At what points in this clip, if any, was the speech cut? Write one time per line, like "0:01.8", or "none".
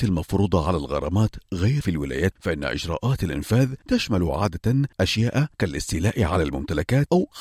0:01.8
0:02.3

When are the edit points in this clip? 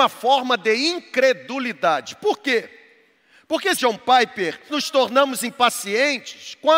0:03.7
0:04.7

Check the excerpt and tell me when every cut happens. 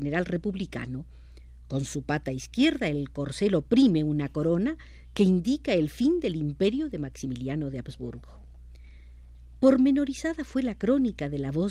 none

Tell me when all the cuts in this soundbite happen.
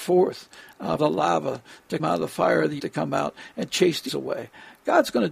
0:01.0
0:02.0
0:02.8
0:04.1

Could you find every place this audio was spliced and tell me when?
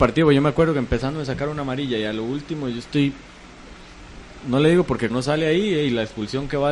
0:05.1

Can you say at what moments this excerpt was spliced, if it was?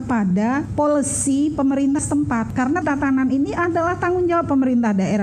0:02.0
0:02.8

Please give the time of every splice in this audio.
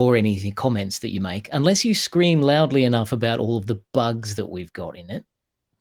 none

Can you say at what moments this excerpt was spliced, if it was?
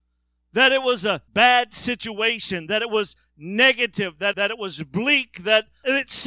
0:01.3
0:04.3

